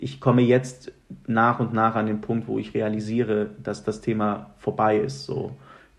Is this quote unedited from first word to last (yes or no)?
yes